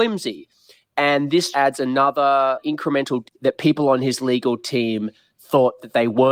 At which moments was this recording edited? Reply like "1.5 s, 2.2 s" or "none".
1.5 s, 3.2 s

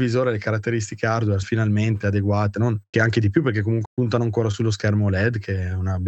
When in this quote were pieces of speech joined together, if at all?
1.4 s, 2.5 s, 2.9 s, 3.8 s

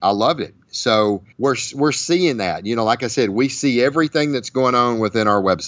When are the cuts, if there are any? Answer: 1.3 s

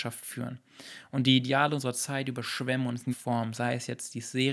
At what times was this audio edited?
3.1 s

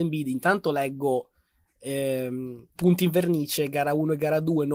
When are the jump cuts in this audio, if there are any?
2.8 s

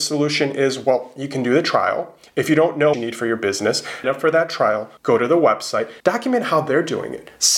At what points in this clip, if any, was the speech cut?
2.9 s, 4.0 s, 5.0 s, 6.0 s

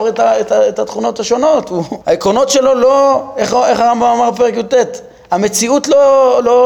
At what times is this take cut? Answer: 2.0 s

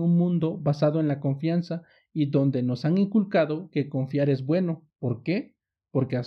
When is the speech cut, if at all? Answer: none

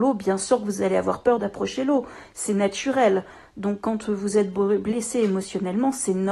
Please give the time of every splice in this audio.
none

